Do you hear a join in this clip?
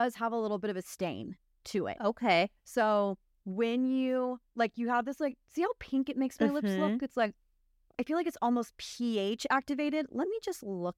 no; 0 cuts

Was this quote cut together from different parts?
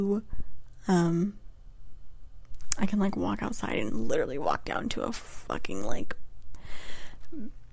no; 0 cuts

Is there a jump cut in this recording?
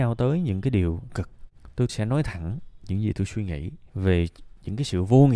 yes; 3 cuts; at 1.1 s, 1.9 s, 3.9 s

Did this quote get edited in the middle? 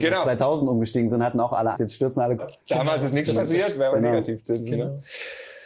yes; 3 cuts; at 1.7 s, 2.4 s, 3.9 s

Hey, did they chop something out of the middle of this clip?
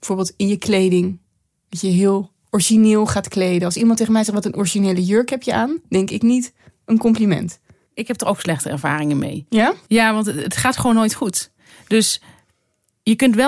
no; 0 cuts

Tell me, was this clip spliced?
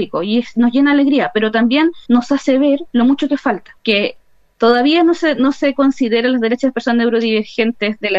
yes; 2 cuts; at 2.0 s, 3.8 s

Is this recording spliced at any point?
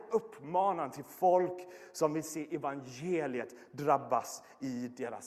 no; 0 cuts

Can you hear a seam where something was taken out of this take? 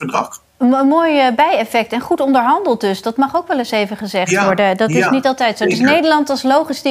no; 0 cuts

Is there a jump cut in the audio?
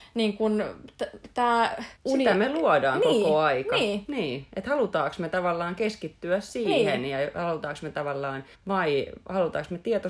yes; 2 cuts; at 2.0 s, 8.5 s

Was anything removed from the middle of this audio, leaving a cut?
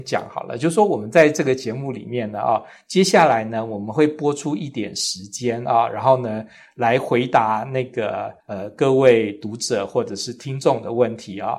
yes; 1 cut; at 8.4 s

